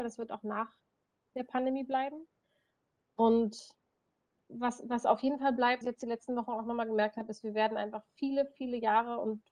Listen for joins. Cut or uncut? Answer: cut